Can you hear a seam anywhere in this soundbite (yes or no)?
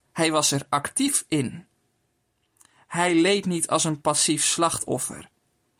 no